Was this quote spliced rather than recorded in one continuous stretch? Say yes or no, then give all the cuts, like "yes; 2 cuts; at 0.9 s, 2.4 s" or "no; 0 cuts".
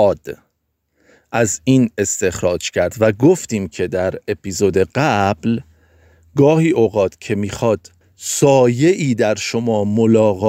yes; 1 cut; at 8.0 s